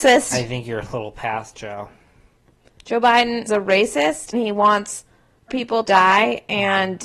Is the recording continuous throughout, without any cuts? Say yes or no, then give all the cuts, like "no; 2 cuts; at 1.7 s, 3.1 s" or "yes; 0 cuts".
no; 5 cuts; at 1.5 s, 3.5 s, 4.3 s, 5.5 s, 5.8 s